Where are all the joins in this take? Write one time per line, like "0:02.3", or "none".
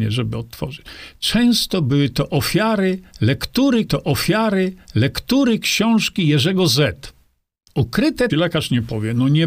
0:03.9
0:08.3